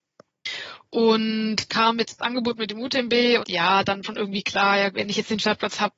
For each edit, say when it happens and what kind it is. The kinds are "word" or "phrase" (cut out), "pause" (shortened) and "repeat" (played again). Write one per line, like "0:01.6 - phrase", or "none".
0:01.7 - word
0:03.4 - word
0:04.0 - word
0:04.9 - word